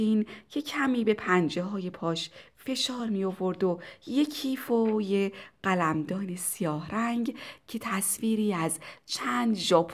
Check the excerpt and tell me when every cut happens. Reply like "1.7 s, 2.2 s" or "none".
none